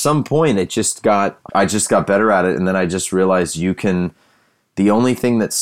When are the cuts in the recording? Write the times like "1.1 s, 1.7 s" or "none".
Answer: 1.5 s